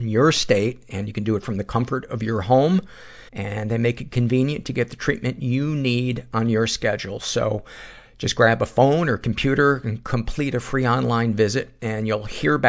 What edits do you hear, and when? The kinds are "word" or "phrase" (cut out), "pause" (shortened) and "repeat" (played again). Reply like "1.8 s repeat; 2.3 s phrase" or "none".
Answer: 3.3 s pause